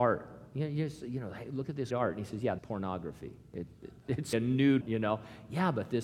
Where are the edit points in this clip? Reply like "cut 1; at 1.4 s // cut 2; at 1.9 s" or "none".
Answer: cut 1; at 1.9 s // cut 2; at 2.6 s // cut 3; at 4.3 s // cut 4; at 4.8 s